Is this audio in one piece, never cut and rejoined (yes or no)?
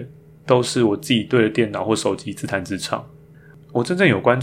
yes